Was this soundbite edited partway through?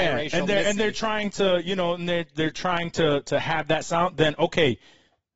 no; 0 cuts

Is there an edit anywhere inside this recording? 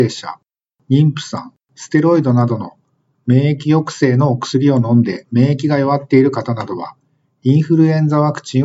no; 0 cuts

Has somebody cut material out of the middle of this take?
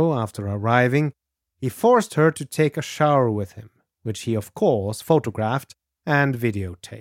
no; 0 cuts

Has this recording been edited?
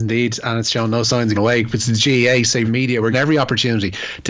yes; 3 cuts; at 1.3 s, 2.7 s, 3.1 s

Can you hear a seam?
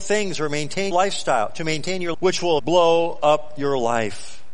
yes; 3 cuts; at 0.9 s, 2.1 s, 2.6 s

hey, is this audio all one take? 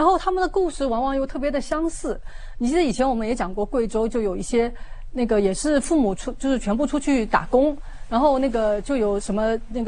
yes; 0 cuts

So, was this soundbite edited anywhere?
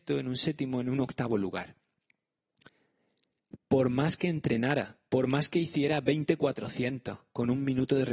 no; 0 cuts

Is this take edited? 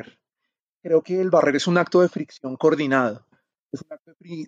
no; 0 cuts

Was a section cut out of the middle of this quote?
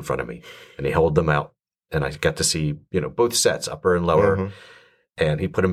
no; 0 cuts

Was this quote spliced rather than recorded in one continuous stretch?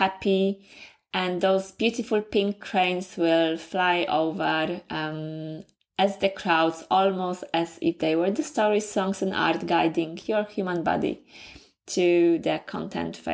no; 0 cuts

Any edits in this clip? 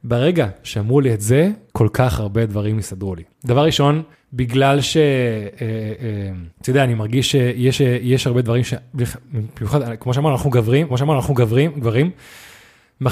yes; 6 cuts; at 1.7 s, 3.3 s, 4.1 s, 6.5 s, 7.8 s, 10.9 s

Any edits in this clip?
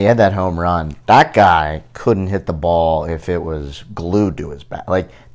no; 0 cuts

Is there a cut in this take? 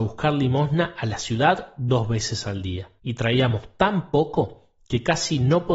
yes; 1 cut; at 3.0 s

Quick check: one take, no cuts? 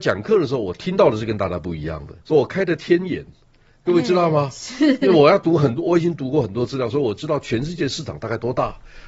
no; 1 cut; at 2.2 s

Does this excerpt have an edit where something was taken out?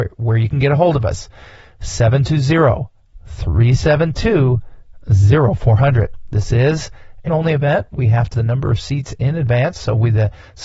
yes; 2 cuts; at 7.3 s, 8.3 s

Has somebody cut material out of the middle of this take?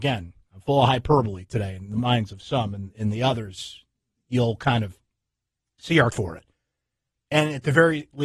yes; 1 cut; at 6.1 s

